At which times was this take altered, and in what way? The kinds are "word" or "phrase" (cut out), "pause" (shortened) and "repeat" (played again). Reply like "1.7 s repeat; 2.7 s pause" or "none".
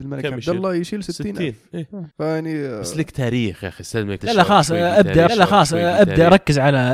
2.1 s pause; 4.2 s word; 5.3 s repeat